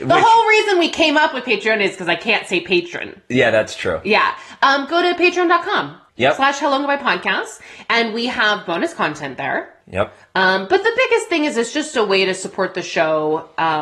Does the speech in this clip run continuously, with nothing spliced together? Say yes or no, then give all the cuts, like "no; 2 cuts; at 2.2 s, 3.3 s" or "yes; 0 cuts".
no; 2 cuts; at 6.1 s, 9.8 s